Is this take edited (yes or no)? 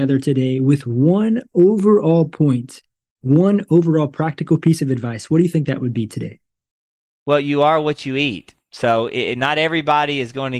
no